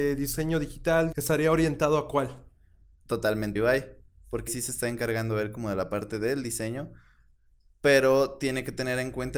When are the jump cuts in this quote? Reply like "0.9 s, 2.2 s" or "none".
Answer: 1.1 s, 3.6 s, 4.5 s